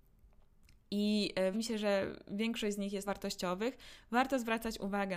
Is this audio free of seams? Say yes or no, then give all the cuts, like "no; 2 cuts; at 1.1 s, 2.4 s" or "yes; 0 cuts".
no; 2 cuts; at 1.5 s, 3.0 s